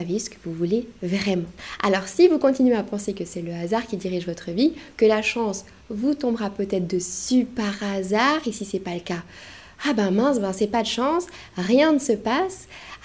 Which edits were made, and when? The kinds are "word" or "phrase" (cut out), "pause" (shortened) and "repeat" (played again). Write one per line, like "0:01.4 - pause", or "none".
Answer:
none